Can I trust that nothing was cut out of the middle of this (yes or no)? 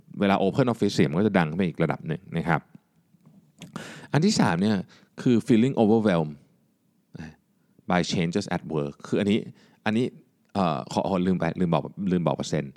yes